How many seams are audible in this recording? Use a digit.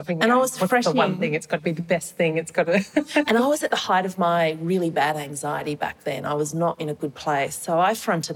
0